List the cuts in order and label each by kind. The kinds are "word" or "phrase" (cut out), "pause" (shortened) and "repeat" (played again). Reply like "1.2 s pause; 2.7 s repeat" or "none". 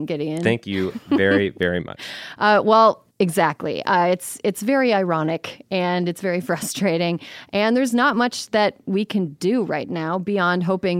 3.1 s pause